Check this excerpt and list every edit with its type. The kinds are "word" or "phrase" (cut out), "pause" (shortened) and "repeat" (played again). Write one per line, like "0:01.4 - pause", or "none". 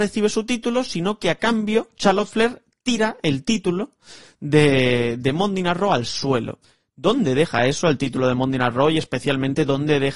none